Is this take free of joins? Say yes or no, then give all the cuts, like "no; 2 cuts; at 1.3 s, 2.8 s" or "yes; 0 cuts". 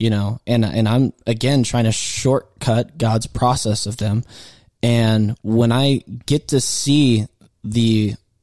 yes; 0 cuts